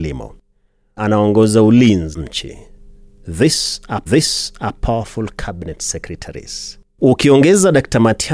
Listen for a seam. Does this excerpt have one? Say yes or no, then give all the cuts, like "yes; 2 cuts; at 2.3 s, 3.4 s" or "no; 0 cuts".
yes; 4 cuts; at 1.0 s, 2.1 s, 4.1 s, 6.9 s